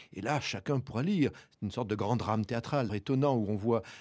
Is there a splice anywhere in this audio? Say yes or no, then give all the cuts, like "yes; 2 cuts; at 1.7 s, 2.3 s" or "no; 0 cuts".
yes; 1 cut; at 2.9 s